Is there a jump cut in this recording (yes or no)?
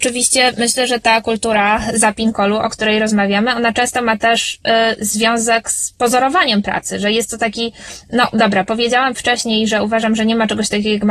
no